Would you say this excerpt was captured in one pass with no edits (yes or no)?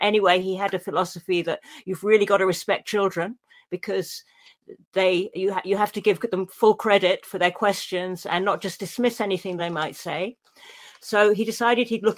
yes